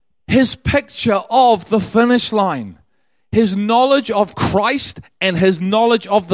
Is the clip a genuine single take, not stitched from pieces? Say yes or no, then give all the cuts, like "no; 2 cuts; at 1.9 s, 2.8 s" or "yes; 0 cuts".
yes; 0 cuts